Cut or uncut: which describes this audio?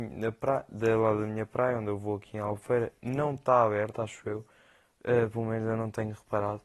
uncut